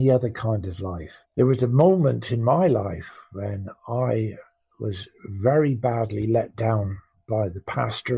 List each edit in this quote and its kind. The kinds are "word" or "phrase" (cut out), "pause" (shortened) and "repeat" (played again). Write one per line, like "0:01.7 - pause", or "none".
0:01.2 - pause